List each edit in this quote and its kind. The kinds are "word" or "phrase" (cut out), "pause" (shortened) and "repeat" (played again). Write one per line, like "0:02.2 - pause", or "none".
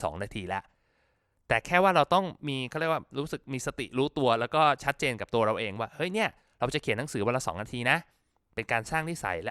0:03.1 - word